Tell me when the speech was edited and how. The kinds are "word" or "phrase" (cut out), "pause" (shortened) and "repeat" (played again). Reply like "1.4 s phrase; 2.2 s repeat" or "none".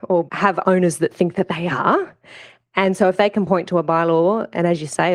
none